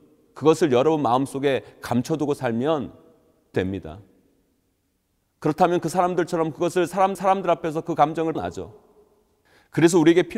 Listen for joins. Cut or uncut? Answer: cut